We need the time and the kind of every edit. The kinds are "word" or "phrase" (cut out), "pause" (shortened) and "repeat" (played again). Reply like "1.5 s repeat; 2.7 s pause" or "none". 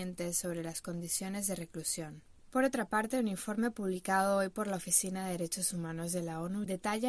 none